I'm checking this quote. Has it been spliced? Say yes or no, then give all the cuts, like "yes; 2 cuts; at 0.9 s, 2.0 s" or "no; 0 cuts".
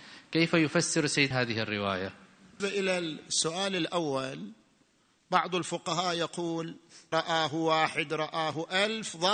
yes; 3 cuts; at 1.3 s, 2.6 s, 7.1 s